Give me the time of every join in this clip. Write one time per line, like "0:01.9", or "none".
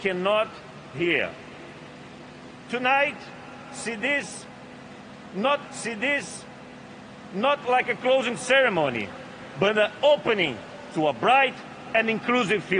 0:00.9
0:05.6